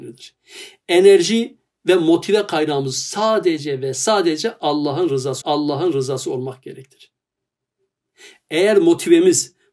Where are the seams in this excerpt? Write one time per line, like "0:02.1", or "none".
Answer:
0:05.4